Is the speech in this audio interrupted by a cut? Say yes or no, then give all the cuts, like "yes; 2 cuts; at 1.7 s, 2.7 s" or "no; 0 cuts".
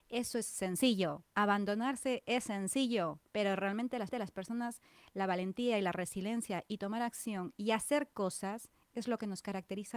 yes; 3 cuts; at 1.2 s, 3.3 s, 4.1 s